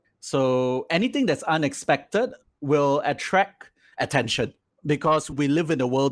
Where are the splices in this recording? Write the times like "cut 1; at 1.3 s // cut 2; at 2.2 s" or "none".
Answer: none